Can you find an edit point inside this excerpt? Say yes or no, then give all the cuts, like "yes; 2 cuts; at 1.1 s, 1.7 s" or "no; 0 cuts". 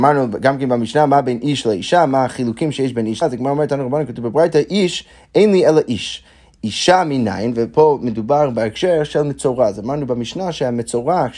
yes; 1 cut; at 3.2 s